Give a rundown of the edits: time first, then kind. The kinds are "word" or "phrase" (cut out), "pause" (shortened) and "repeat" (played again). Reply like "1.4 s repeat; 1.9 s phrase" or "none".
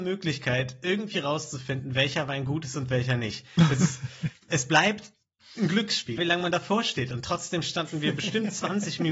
6.2 s word